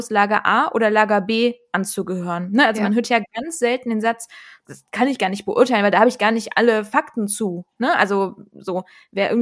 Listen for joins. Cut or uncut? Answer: cut